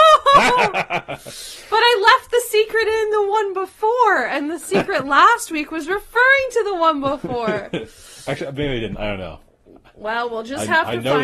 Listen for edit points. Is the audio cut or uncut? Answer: uncut